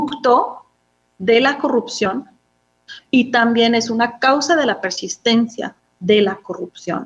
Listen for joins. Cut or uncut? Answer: uncut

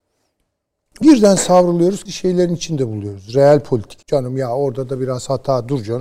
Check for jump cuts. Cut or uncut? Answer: cut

